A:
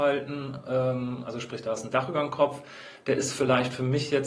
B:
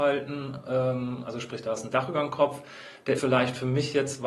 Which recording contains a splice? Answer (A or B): B